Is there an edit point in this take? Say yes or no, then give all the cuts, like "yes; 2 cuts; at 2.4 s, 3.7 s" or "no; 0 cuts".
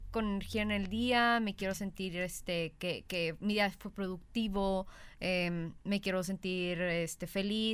no; 0 cuts